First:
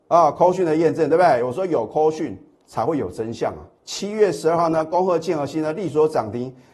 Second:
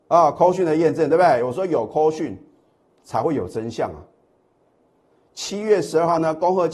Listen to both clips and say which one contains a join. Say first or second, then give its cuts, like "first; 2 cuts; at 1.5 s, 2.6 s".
first; 2 cuts; at 2.6 s, 3.7 s